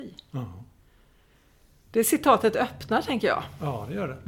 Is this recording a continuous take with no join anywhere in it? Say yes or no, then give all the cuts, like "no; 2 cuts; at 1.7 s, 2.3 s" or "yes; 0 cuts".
yes; 0 cuts